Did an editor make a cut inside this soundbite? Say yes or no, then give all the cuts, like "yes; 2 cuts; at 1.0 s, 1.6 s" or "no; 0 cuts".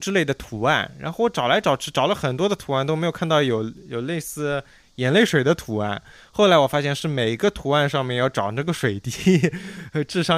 no; 0 cuts